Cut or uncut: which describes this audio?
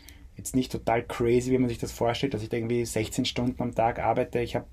uncut